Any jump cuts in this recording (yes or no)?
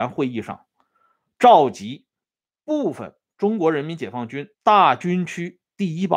yes